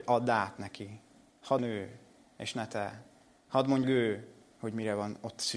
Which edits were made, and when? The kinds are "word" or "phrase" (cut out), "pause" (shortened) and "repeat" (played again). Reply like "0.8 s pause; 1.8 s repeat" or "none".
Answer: 1.6 s word; 3.8 s word